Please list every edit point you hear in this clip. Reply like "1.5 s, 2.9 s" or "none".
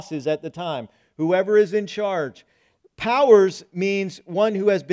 none